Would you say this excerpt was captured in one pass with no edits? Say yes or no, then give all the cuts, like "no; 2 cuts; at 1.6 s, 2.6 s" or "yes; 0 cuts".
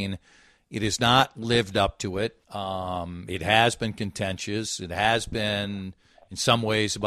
no; 1 cut; at 2.4 s